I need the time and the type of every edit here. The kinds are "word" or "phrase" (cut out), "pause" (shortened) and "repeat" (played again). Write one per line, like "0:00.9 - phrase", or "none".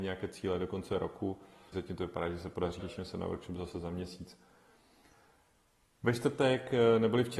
0:01.7 - phrase
0:02.8 - phrase